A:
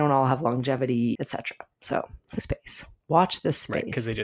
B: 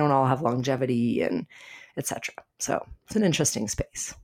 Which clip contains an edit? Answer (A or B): A